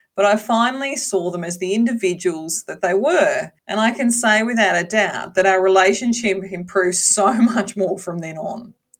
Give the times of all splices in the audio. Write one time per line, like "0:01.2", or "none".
0:03.6